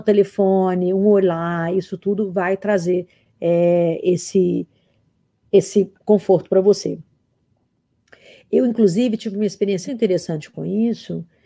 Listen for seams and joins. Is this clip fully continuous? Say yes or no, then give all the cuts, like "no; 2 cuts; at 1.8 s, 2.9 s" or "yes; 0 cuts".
no; 2 cuts; at 6.0 s, 9.9 s